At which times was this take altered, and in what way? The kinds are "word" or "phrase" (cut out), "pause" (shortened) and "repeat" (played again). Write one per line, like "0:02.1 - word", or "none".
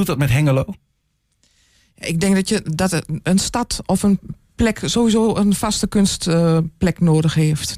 none